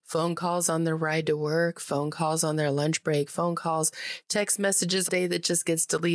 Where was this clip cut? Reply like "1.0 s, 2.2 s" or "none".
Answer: 5.1 s